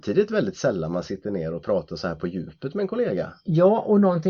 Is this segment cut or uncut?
uncut